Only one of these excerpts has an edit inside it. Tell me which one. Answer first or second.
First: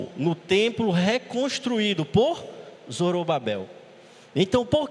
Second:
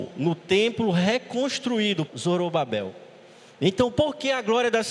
second